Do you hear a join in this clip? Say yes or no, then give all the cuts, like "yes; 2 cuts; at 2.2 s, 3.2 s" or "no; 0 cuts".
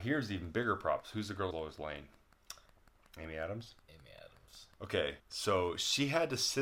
yes; 3 cuts; at 1.5 s, 3.8 s, 5.2 s